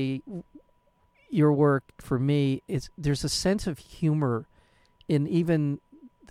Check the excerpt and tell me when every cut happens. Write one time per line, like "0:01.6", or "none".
none